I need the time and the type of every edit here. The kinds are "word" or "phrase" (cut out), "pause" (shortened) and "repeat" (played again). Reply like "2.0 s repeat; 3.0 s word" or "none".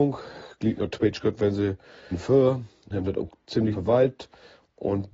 2.1 s word; 2.9 s word; 3.7 s word

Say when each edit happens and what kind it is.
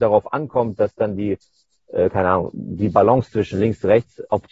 none

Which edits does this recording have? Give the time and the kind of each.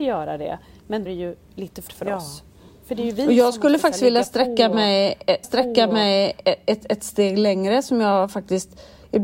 1.1 s phrase; 1.9 s word; 5.4 s repeat

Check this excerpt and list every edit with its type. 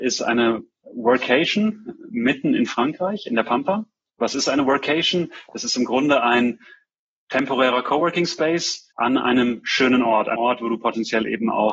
8.9 s pause; 10.3 s word

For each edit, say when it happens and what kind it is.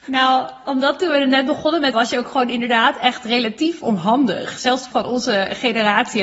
1.9 s word; 4.9 s word

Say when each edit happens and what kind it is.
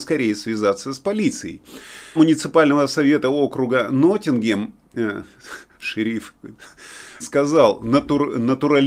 2.2 s word; 7.2 s phrase

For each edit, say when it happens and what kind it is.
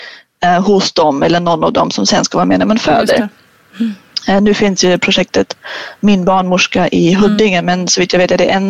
none

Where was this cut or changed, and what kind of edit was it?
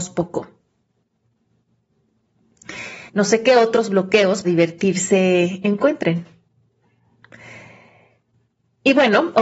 3.1 s pause; 4.4 s word

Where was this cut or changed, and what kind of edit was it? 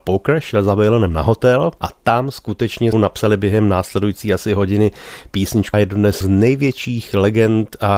2.9 s word; 5.7 s word; 6.2 s word

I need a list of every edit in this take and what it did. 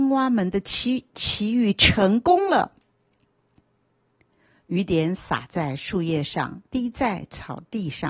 6.7 s pause

